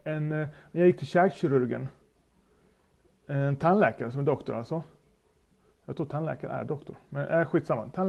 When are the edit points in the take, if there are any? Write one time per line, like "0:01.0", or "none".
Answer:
none